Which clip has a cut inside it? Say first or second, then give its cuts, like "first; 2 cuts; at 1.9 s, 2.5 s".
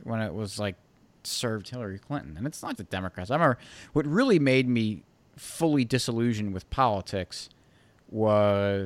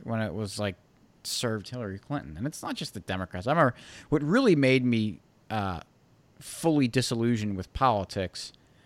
first; 2 cuts; at 2.8 s, 5.2 s